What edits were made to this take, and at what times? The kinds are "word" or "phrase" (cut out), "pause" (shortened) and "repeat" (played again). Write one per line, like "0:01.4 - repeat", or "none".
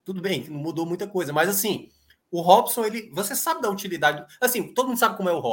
none